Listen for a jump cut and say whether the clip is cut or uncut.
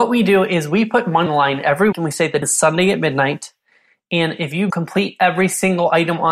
cut